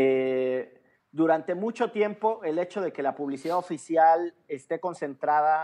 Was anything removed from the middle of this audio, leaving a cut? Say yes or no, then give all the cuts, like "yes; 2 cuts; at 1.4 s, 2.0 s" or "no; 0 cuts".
no; 0 cuts